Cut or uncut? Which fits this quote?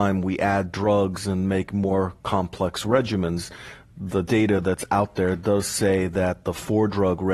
uncut